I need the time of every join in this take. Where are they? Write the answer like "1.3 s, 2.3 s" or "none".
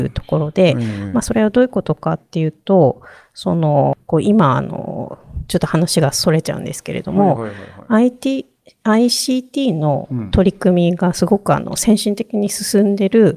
none